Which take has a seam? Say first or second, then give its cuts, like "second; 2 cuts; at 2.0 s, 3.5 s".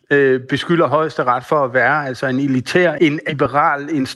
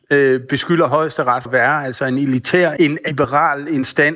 second; 1 cut; at 1.4 s